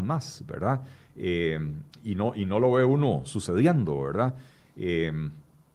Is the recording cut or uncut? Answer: uncut